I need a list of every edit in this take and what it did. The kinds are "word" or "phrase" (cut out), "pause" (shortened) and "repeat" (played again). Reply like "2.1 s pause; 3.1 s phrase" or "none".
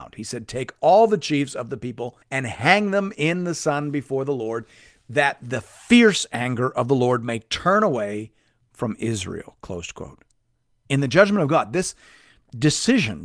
2.2 s pause